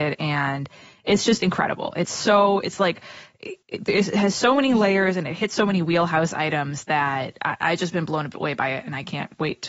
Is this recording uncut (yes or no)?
no